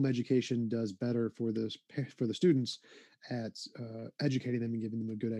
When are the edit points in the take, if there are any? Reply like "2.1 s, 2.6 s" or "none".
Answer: none